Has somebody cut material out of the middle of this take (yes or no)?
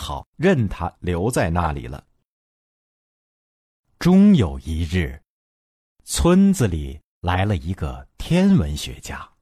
no